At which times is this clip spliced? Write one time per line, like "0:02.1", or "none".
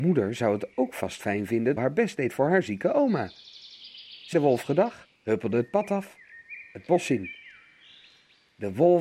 0:01.8
0:04.3
0:05.1